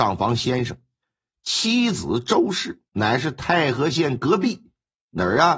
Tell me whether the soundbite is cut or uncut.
cut